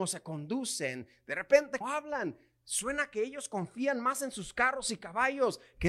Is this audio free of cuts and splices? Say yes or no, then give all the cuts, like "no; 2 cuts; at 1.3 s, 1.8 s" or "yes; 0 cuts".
no; 1 cut; at 1.8 s